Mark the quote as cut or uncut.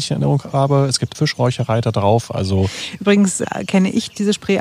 cut